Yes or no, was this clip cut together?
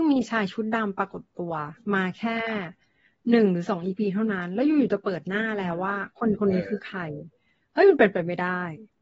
no